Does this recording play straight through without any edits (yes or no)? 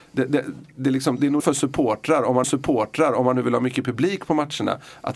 no